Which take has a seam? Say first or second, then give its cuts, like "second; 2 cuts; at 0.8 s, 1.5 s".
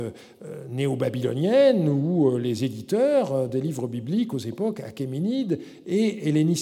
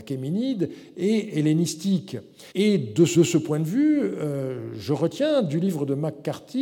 second; 2 cuts; at 2.5 s, 3.1 s